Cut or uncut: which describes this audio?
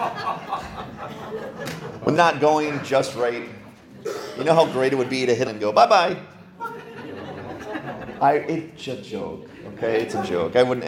cut